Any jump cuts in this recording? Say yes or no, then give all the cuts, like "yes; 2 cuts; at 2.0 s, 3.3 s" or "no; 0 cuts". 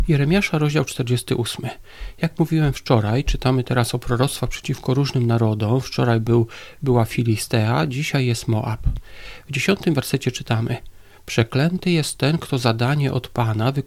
no; 0 cuts